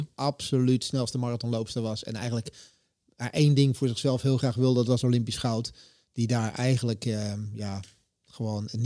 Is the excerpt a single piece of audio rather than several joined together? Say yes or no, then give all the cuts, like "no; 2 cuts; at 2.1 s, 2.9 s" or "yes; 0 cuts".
yes; 0 cuts